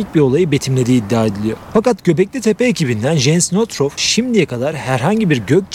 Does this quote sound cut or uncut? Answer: uncut